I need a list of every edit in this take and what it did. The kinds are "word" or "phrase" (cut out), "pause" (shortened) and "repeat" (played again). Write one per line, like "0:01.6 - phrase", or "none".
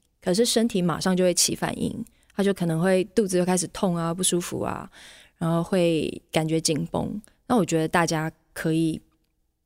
none